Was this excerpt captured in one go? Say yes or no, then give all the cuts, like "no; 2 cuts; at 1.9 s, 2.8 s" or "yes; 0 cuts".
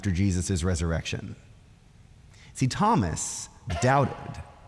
yes; 0 cuts